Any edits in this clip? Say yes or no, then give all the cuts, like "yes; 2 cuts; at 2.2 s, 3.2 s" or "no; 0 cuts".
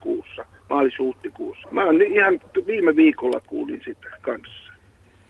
yes; 1 cut; at 1.6 s